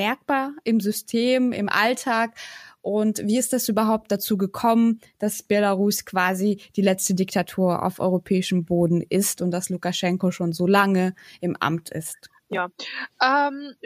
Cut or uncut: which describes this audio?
uncut